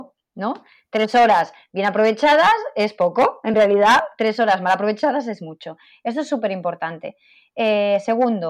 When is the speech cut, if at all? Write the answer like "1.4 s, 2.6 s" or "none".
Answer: none